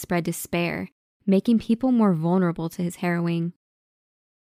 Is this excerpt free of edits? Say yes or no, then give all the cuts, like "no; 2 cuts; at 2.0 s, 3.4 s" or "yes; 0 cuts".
yes; 0 cuts